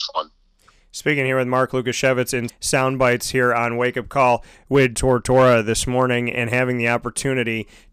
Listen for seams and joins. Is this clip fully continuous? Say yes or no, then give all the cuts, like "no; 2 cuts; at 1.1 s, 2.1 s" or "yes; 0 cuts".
no; 3 cuts; at 2.5 s, 4.9 s, 6.3 s